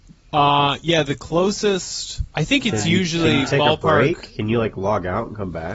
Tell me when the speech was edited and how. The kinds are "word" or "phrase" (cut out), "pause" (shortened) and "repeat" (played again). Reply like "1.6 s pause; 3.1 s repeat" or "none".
2.3 s pause